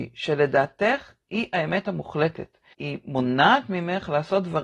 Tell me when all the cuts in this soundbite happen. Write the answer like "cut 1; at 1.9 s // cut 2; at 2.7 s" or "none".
cut 1; at 2.7 s